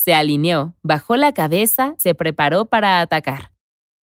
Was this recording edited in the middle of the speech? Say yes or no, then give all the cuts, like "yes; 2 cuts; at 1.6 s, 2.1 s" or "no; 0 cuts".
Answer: yes; 1 cut; at 2.0 s